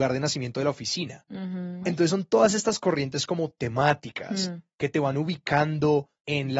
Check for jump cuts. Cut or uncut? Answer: uncut